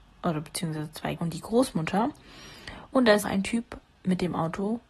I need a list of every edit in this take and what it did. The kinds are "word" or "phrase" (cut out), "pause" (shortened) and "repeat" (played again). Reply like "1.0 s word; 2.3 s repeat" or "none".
1.2 s word; 3.2 s word